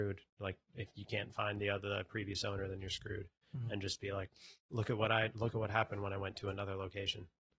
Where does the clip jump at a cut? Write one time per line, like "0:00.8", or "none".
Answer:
none

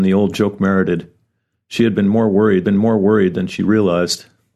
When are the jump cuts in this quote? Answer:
0:02.6

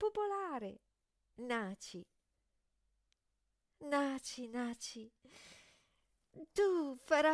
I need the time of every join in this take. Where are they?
none

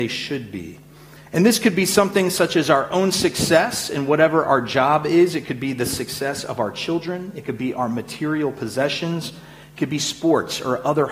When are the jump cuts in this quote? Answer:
none

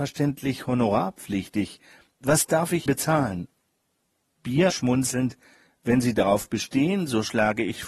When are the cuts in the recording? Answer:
0:02.9
0:04.7

